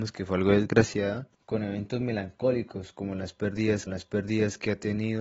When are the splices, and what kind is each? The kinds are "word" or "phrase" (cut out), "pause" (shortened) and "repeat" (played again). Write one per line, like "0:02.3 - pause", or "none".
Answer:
0:01.3 - pause
0:03.9 - repeat

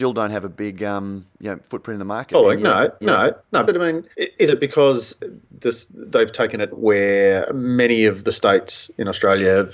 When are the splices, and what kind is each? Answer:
0:01.3 - pause
0:03.0 - repeat
0:03.6 - word
0:04.1 - pause
0:06.7 - word

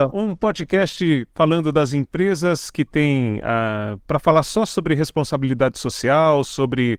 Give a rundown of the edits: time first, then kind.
0:01.3 - pause

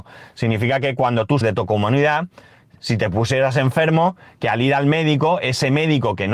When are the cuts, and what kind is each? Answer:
0:01.4 - word

